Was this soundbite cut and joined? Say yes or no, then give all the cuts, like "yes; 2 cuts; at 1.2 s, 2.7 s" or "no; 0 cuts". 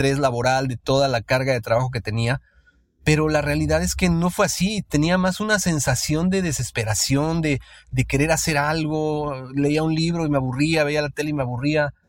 no; 0 cuts